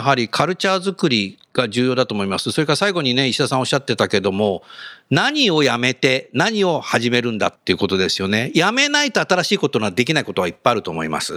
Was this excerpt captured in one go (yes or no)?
no